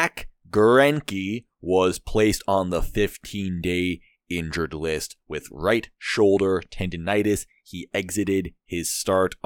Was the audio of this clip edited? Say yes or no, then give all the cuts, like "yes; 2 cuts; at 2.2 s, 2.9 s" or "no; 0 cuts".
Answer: no; 0 cuts